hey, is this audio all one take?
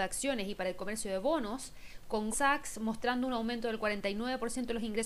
no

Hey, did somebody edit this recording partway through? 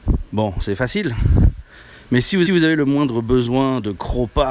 yes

